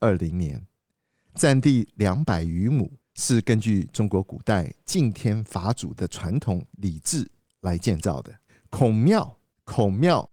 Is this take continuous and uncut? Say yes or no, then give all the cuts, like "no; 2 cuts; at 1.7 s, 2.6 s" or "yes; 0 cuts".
no; 2 cuts; at 3.0 s, 8.5 s